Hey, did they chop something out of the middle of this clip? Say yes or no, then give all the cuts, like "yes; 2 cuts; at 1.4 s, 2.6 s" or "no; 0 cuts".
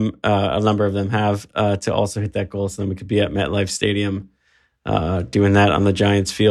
no; 0 cuts